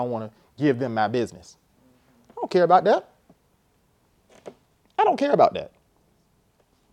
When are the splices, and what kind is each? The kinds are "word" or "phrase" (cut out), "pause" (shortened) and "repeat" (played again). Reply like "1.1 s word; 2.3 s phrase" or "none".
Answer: none